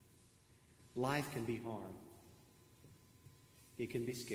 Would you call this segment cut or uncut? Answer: uncut